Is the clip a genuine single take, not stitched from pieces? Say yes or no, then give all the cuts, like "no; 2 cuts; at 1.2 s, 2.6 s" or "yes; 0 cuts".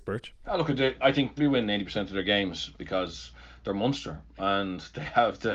no; 4 cuts; at 1.0 s, 1.4 s, 2.7 s, 4.4 s